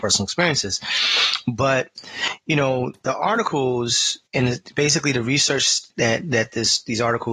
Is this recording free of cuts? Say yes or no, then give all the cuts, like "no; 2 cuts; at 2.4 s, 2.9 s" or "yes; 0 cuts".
no; 2 cuts; at 4.3 s, 5.9 s